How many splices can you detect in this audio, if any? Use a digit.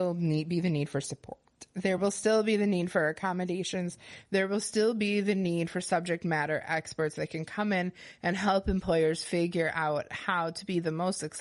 0